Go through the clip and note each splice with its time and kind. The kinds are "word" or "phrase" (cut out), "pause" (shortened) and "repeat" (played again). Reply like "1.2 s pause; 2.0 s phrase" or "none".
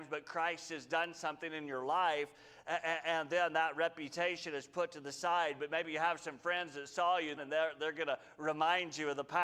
7.4 s word